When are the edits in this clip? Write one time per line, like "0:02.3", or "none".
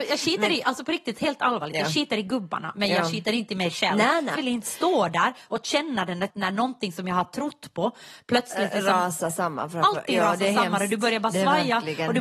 0:04.3
0:06.3

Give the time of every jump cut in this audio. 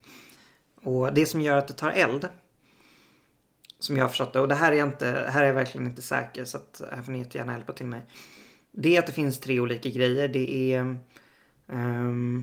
none

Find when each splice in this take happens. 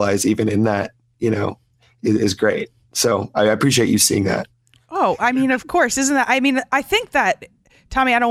none

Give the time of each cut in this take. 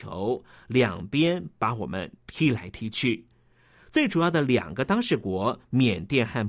0:02.2

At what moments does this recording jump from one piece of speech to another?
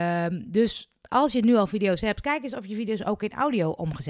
none

